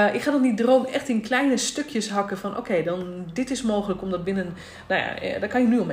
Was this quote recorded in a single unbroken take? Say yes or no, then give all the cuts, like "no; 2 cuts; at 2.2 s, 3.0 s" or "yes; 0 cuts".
yes; 0 cuts